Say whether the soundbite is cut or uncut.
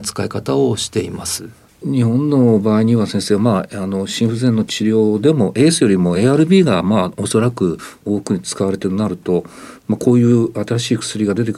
uncut